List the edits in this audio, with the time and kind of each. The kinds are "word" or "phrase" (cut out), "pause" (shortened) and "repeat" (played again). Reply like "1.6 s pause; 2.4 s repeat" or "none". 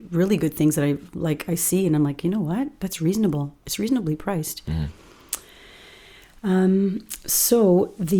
none